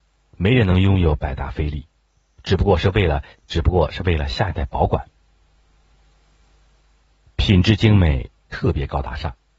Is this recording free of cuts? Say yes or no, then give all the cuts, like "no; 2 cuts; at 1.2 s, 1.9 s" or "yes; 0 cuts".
yes; 0 cuts